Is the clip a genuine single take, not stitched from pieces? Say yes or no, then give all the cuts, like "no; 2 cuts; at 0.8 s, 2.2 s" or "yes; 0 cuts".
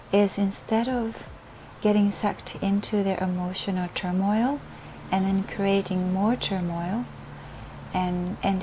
yes; 0 cuts